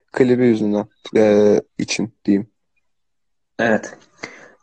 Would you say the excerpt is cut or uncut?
cut